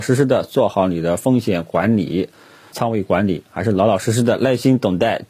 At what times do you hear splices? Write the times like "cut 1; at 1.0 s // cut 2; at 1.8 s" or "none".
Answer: cut 1; at 2.7 s